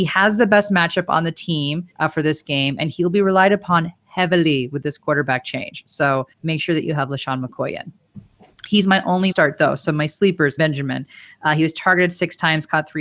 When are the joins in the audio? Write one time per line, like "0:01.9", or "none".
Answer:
0:01.9
0:06.3
0:09.3
0:10.6